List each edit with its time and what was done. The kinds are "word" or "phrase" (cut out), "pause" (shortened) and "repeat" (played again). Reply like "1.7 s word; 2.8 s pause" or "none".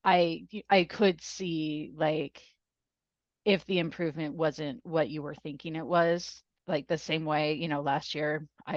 none